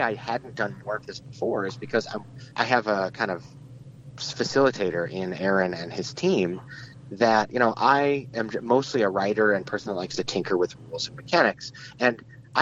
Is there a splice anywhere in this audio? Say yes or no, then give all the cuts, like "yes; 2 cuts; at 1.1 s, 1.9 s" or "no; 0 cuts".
yes; 1 cut; at 2.5 s